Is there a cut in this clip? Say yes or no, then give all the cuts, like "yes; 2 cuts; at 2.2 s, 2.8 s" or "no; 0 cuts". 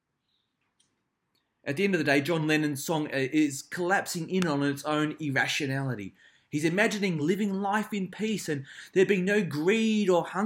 no; 0 cuts